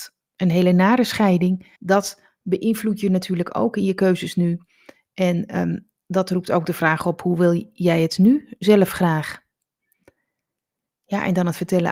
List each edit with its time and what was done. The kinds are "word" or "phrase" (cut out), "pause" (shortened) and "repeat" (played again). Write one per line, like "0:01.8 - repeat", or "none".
0:01.8 - pause